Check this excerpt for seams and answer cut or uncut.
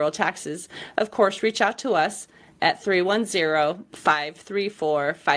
uncut